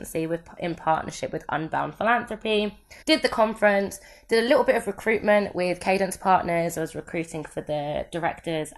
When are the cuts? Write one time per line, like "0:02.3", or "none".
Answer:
0:03.0